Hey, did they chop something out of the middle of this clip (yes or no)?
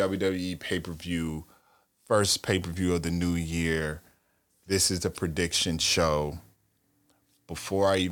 no